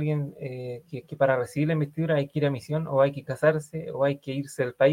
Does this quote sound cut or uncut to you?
uncut